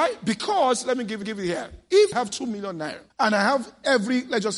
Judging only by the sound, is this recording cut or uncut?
cut